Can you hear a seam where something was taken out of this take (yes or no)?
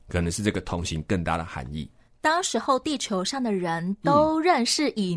no